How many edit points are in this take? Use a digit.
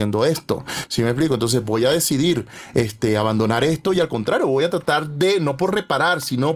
0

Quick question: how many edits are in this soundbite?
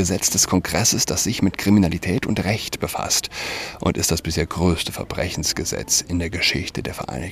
0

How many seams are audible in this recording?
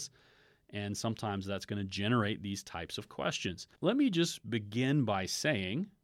1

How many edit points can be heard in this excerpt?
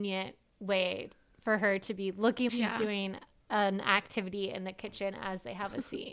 1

